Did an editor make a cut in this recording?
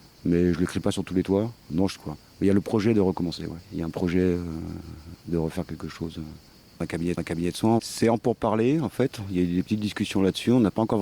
yes; 5 cuts; at 1.6 s, 2.0 s, 3.6 s, 6.5 s, 7.2 s

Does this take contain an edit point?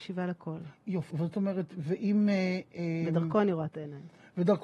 yes; 1 cut; at 1.1 s

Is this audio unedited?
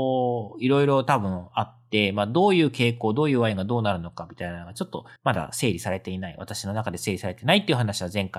no; 1 cut; at 5.2 s

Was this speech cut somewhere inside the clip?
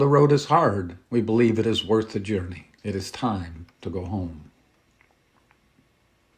yes; 3 cuts; at 1.1 s, 2.8 s, 3.7 s

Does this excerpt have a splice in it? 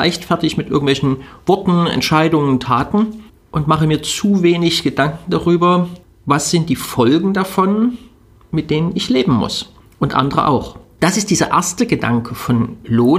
no; 0 cuts

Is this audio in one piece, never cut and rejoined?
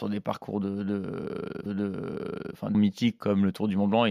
no; 2 cuts; at 1.7 s, 2.7 s

